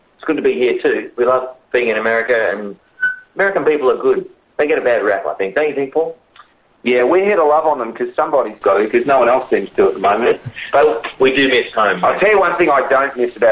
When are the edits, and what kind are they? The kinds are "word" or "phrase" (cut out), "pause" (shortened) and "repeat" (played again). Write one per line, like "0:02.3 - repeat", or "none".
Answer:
none